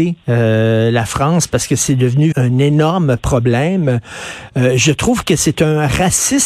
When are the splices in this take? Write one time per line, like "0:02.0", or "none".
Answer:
0:02.3